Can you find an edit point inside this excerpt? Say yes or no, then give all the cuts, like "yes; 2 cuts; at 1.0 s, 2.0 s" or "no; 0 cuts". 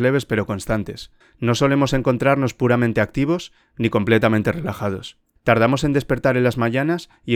yes; 2 cuts; at 1.2 s, 5.4 s